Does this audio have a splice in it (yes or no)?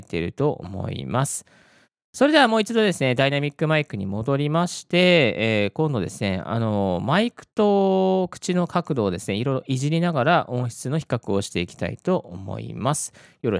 no